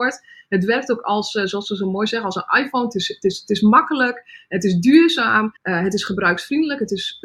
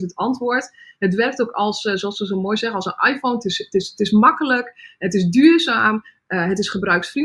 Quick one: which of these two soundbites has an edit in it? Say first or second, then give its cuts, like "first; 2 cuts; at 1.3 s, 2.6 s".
first; 1 cut; at 5.6 s